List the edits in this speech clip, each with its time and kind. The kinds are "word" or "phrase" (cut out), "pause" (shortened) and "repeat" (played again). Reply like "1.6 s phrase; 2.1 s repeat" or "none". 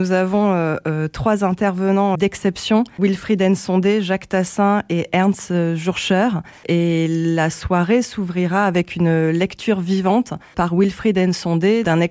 2.1 s word